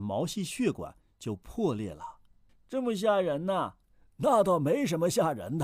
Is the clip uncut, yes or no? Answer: no